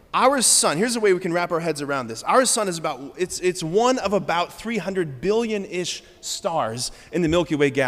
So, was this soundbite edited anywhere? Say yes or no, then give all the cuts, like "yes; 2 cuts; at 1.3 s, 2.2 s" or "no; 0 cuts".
no; 0 cuts